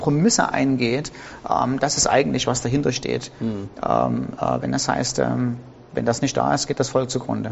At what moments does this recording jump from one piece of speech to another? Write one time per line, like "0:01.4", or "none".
none